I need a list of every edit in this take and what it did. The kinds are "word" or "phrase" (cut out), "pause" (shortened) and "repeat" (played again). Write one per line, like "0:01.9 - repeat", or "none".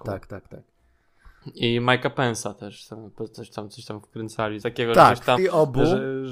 0:04.6 - word
0:05.4 - word

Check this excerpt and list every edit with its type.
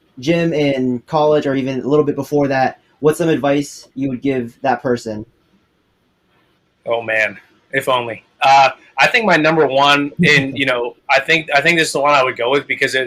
none

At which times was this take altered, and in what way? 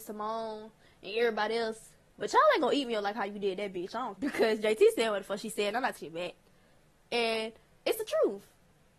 0:04.2 - word
0:06.0 - word

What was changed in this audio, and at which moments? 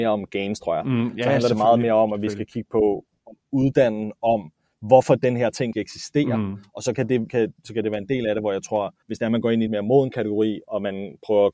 0:05.7 - word
0:07.3 - word
0:09.0 - pause
0:09.7 - word

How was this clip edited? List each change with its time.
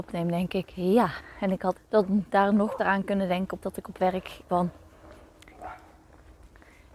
0:01.7 - word
0:02.8 - word
0:03.6 - word
0:04.5 - word

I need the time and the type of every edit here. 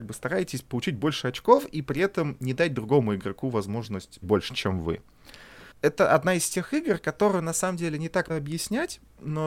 0:04.2 - word
0:05.7 - pause
0:08.3 - word

